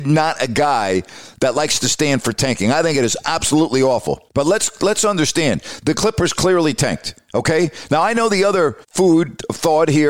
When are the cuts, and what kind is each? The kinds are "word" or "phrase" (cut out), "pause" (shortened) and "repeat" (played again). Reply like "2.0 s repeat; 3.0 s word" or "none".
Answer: 4.3 s pause; 8.8 s pause